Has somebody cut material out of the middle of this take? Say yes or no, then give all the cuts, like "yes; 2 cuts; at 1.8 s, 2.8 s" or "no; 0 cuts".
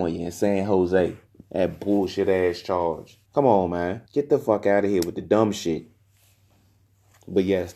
yes; 3 cuts; at 1.3 s, 3.2 s, 4.1 s